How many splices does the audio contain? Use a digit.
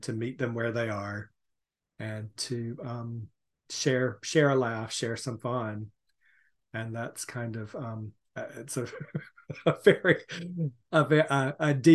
0